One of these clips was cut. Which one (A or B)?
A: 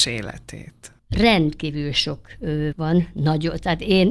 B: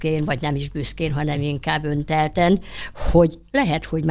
A